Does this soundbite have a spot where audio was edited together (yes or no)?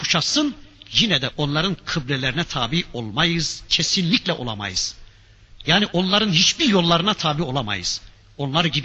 no